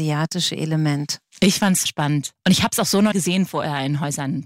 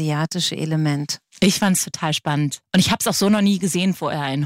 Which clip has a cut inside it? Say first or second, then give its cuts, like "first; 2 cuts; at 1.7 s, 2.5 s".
first; 2 cuts; at 1.9 s, 3.1 s